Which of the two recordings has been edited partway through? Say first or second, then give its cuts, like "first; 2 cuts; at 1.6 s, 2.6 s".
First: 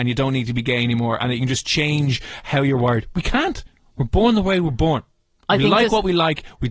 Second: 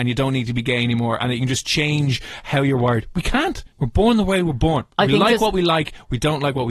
second; 2 cuts; at 3.7 s, 4.9 s